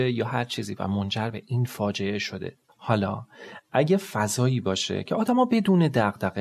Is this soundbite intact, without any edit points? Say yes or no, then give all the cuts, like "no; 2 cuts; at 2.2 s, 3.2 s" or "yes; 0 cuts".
no; 1 cut; at 2.7 s